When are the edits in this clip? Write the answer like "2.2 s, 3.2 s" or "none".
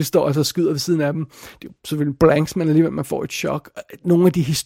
none